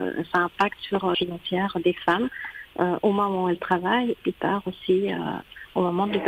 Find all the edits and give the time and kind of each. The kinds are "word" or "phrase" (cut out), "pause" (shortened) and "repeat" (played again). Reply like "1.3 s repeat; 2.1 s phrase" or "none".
1.1 s word; 4.1 s word

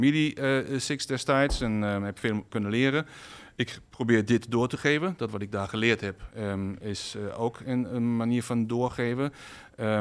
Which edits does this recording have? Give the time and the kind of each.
none

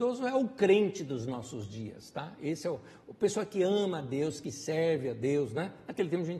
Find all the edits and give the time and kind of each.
none

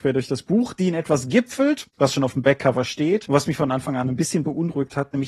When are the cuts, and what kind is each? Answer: none

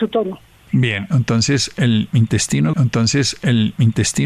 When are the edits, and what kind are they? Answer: 2.7 s repeat

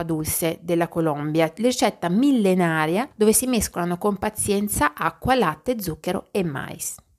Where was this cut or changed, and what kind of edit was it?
none

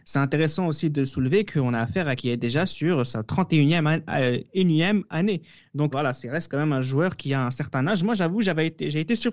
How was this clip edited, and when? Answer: 2.2 s word; 5.9 s word

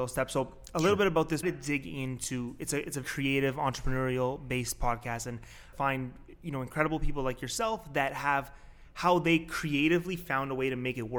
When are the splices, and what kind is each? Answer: 1.4 s phrase; 3.0 s word; 5.7 s phrase

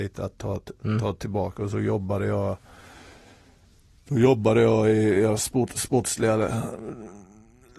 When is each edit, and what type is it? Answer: none

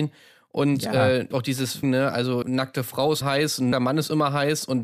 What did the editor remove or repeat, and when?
1.3 s word; 1.8 s word; 2.4 s word; 3.2 s word; 3.7 s word

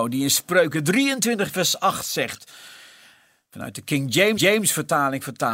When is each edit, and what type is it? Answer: 4.4 s repeat

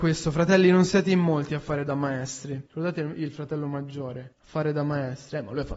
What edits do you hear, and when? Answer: 2.7 s pause; 4.3 s pause

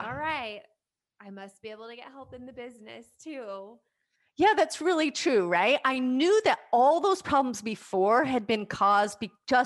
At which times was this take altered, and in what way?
none

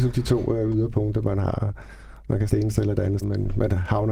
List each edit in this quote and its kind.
2.5 s word; 3.2 s word

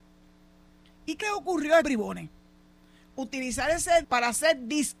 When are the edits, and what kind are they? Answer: 1.2 s word; 1.8 s word; 4.0 s word

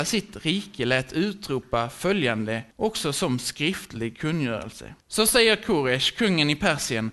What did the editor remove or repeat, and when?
2.7 s pause; 5.0 s pause

